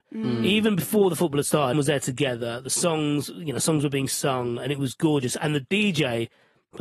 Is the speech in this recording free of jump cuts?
no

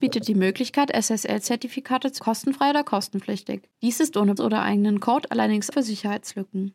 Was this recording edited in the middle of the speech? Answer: yes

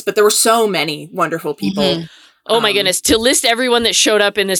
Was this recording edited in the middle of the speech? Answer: no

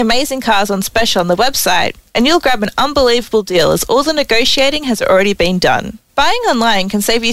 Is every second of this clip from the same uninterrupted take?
no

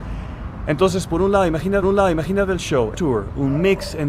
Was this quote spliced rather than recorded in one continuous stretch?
yes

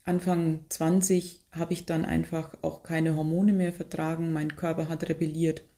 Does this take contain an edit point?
no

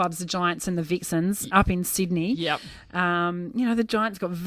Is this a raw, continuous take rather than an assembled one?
yes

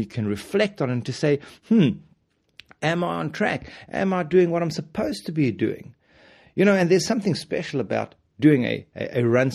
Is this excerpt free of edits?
yes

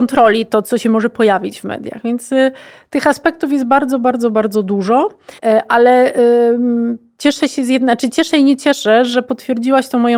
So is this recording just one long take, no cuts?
no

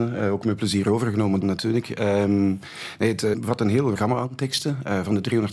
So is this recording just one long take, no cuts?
no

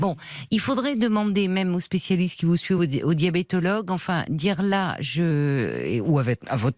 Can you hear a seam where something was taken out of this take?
no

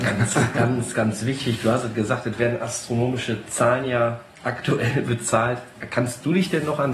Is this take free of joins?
yes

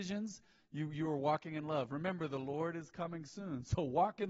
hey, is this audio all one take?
yes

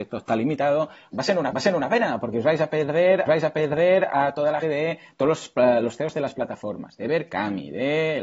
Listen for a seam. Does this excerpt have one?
yes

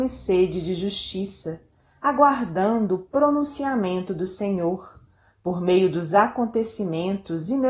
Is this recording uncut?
yes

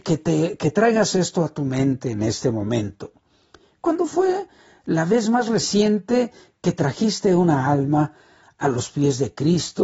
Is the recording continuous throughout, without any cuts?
yes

